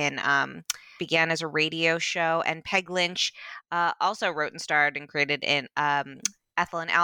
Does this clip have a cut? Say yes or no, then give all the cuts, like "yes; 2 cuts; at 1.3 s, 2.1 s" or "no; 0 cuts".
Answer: yes; 1 cut; at 1.0 s